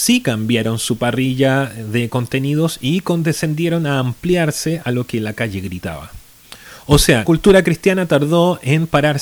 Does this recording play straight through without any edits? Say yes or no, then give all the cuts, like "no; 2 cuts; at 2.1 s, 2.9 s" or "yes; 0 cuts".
no; 1 cut; at 7.2 s